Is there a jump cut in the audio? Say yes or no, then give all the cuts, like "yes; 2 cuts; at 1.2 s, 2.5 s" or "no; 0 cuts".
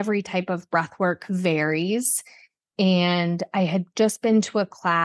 no; 0 cuts